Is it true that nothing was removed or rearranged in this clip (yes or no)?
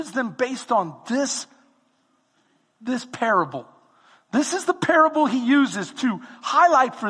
yes